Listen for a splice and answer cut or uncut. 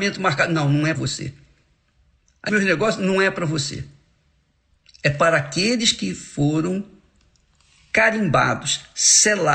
cut